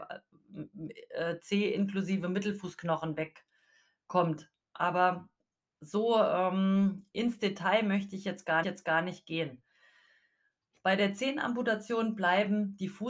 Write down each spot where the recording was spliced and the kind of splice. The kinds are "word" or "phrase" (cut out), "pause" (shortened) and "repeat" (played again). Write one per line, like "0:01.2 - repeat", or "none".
0:08.6 - repeat